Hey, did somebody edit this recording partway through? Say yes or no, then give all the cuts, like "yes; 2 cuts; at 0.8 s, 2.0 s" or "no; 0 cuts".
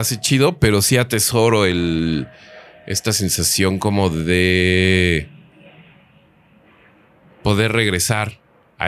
no; 0 cuts